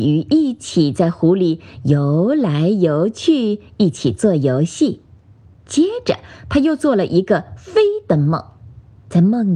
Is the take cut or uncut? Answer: uncut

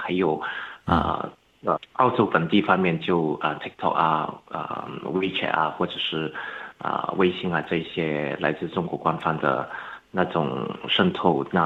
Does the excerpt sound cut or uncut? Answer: cut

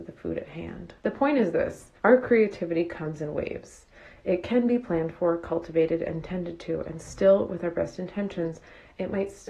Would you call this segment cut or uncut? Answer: cut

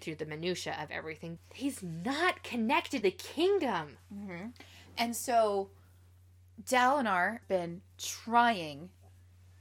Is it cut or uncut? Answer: cut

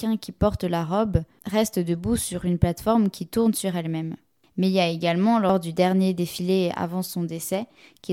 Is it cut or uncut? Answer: uncut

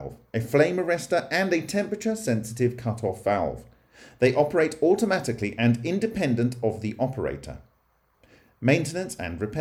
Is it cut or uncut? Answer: uncut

